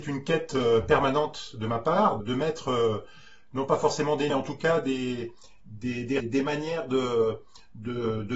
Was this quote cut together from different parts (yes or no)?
yes